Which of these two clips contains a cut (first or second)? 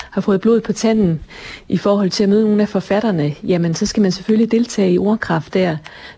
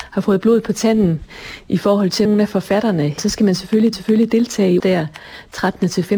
second